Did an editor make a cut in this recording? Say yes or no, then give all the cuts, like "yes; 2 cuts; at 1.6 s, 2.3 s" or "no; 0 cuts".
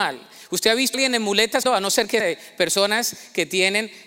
yes; 3 cuts; at 0.9 s, 1.6 s, 2.2 s